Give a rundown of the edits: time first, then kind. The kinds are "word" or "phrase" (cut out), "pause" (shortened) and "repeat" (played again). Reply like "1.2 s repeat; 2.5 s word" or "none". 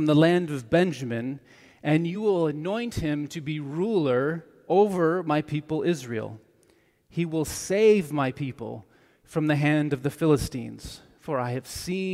none